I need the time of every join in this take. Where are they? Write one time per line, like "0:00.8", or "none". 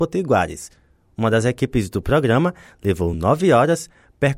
none